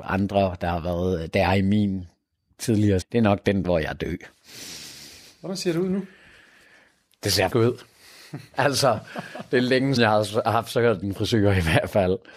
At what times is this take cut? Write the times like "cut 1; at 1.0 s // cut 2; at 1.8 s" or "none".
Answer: cut 1; at 3.0 s // cut 2; at 3.6 s // cut 3; at 7.5 s // cut 4; at 10.0 s // cut 5; at 11.0 s